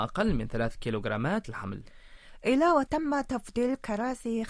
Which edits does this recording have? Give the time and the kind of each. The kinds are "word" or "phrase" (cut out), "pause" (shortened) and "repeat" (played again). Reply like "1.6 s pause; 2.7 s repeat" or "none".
1.4 s phrase; 2.9 s phrase